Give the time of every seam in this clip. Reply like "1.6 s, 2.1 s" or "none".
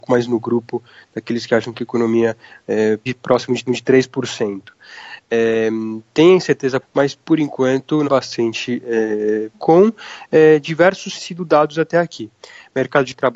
3.1 s, 3.7 s, 6.8 s, 7.2 s, 8.0 s, 9.5 s, 11.1 s